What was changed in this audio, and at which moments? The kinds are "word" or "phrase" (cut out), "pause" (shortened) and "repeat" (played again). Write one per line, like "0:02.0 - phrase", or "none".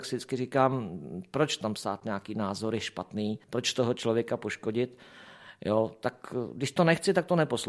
0:03.4 - pause